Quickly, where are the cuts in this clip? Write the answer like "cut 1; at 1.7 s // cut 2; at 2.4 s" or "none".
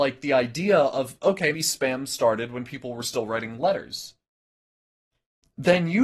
cut 1; at 1.5 s